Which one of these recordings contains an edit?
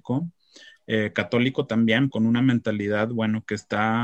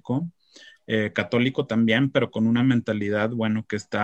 first; 1 cut; at 2.1 s

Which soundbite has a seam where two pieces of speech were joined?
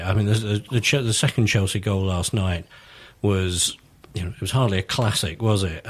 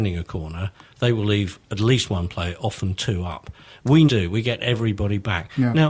second; 1 cut; at 4.1 s

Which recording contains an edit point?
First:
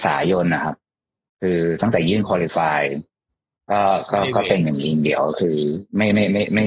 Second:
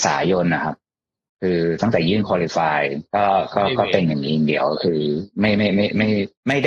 second; 1 cut; at 3.1 s

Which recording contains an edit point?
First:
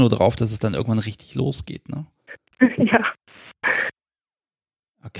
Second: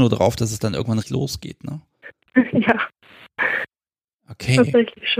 second; 2 cuts; at 1.0 s, 3.9 s

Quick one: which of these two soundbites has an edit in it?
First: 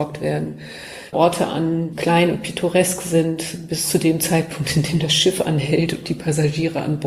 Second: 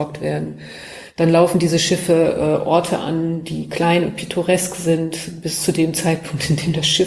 first; 2 cuts; at 1.1 s, 1.9 s

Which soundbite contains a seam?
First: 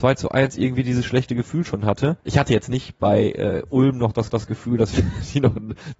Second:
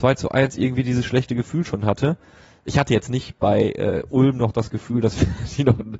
first; 2 cuts; at 2.2 s, 4.3 s

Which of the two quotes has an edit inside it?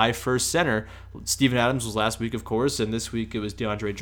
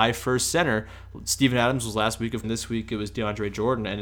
second; 1 cut; at 2.4 s

